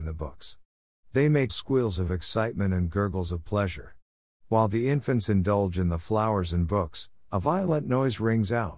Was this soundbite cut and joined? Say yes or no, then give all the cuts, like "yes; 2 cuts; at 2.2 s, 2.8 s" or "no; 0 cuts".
yes; 1 cut; at 1.5 s